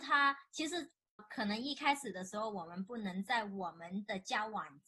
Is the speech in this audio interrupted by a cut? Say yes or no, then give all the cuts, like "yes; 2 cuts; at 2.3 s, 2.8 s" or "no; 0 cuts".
yes; 1 cut; at 1.2 s